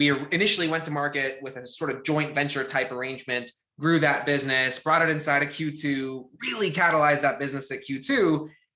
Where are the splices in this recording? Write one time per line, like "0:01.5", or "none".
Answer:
none